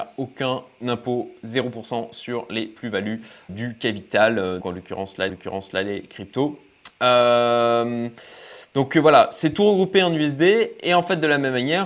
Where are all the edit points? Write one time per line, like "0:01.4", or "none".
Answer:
0:03.5
0:04.6
0:05.3

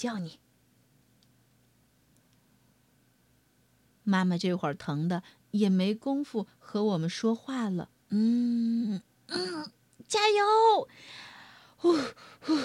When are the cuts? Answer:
0:08.0

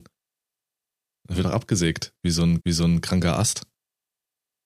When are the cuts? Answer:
0:01.4
0:02.6

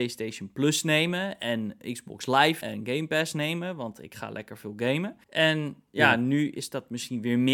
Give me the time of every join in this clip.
0:02.6
0:05.2

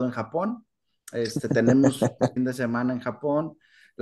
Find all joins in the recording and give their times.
0:02.4

